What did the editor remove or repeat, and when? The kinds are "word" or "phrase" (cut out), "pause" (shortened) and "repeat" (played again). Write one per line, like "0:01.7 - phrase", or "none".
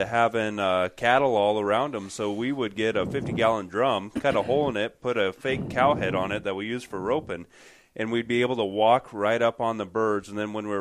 none